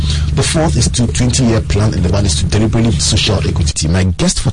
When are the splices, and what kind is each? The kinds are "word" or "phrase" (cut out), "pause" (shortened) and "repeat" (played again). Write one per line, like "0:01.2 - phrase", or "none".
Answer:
0:01.1 - word
0:02.1 - word
0:03.0 - word